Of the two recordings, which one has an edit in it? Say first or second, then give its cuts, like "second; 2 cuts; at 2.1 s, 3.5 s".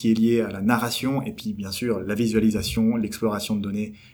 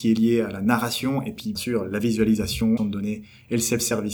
second; 2 cuts; at 1.5 s, 2.8 s